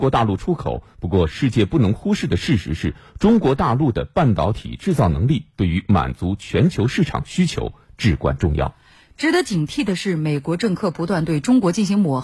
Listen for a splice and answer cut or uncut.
uncut